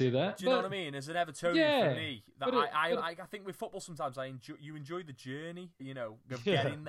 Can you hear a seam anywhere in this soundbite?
yes; 1 cut; at 5.8 s

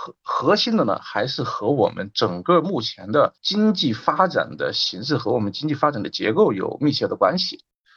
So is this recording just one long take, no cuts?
no; 1 cut; at 3.4 s

